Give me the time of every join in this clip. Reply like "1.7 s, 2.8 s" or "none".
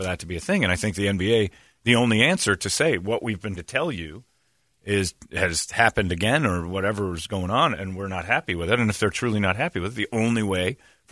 3.6 s